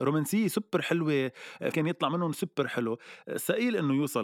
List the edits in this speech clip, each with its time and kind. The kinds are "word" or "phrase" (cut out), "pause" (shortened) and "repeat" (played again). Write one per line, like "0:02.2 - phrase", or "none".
0:01.7 - word